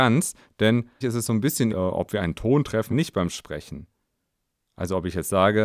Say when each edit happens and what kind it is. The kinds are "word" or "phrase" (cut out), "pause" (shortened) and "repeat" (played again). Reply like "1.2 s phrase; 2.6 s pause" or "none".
1.0 s word; 1.7 s word; 2.9 s word